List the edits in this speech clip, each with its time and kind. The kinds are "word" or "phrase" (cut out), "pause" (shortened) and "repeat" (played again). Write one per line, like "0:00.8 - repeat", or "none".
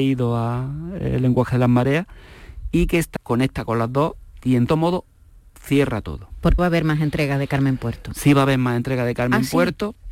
0:03.2 - word
0:04.7 - word
0:06.6 - word